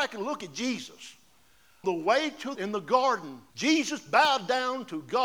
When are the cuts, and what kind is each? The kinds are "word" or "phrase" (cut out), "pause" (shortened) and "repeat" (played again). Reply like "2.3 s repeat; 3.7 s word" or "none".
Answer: 1.8 s word; 2.5 s phrase; 3.5 s pause